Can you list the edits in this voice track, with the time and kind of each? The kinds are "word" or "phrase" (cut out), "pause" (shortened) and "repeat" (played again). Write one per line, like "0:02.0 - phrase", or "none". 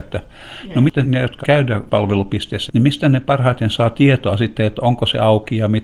0:01.0 - word
0:01.4 - word
0:02.7 - word